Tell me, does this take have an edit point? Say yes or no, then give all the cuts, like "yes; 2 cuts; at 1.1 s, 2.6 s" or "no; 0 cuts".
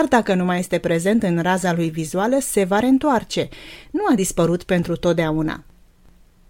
no; 0 cuts